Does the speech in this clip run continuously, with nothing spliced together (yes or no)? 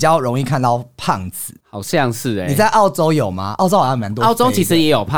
no